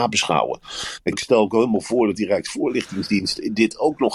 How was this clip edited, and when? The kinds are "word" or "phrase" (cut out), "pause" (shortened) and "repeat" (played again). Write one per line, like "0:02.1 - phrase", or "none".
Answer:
0:01.1 - word